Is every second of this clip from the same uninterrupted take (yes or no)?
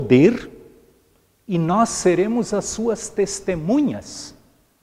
yes